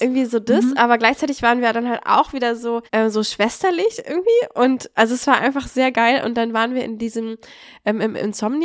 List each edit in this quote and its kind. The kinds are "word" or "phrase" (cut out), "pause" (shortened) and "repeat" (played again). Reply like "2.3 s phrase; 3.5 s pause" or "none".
2.9 s pause